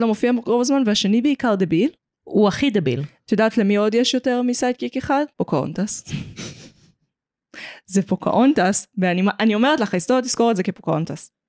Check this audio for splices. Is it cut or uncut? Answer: cut